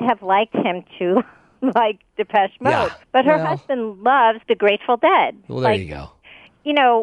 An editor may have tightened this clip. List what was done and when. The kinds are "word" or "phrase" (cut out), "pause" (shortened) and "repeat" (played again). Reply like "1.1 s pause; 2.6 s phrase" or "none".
3.0 s pause; 4.4 s pause